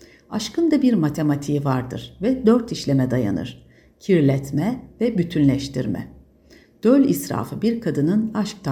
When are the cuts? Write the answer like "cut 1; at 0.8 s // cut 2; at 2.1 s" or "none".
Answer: cut 1; at 5.0 s